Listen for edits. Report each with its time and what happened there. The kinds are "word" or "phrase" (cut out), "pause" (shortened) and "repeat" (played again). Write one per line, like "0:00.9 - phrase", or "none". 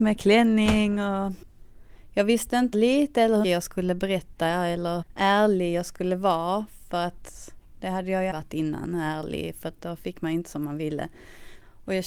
0:02.7 - word
0:03.4 - word
0:05.0 - word
0:08.3 - word